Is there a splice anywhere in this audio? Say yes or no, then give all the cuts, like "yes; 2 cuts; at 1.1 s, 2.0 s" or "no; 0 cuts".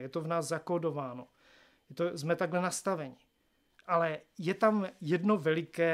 no; 0 cuts